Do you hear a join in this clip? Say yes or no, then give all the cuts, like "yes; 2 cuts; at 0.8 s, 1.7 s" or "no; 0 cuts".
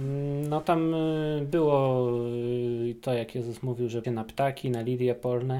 yes; 1 cut; at 4.0 s